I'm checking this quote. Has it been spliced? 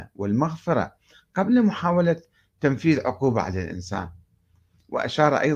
no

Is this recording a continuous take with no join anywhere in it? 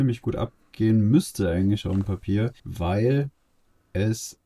no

